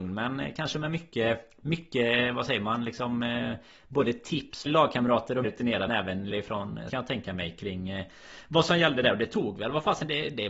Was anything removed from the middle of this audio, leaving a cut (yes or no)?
yes